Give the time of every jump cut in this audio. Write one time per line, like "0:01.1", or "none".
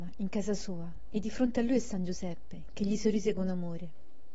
none